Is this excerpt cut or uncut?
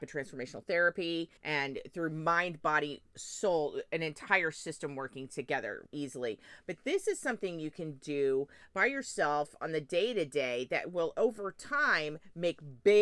cut